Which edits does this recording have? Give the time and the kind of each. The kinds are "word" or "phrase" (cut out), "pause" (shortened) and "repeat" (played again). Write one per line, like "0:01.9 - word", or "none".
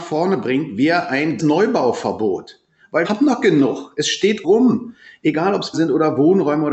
0:01.4 - word
0:03.0 - word
0:04.4 - word
0:05.7 - word